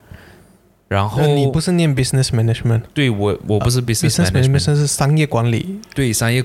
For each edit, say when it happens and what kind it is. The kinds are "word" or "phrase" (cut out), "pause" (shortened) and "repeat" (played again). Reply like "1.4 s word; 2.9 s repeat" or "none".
none